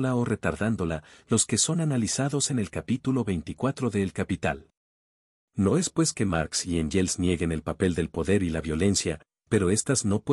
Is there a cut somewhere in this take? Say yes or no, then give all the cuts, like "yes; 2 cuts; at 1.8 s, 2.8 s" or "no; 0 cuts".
no; 0 cuts